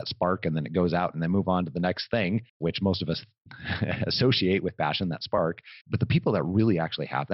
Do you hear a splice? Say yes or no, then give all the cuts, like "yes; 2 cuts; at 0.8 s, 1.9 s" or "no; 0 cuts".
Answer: yes; 2 cuts; at 2.5 s, 5.8 s